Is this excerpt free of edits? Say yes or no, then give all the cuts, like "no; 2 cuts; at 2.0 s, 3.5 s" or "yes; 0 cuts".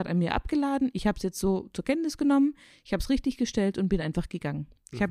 yes; 0 cuts